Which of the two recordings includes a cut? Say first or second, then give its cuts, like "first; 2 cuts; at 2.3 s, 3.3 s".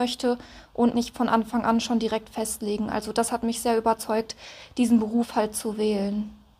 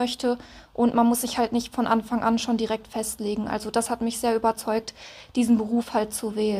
first; 1 cut; at 0.9 s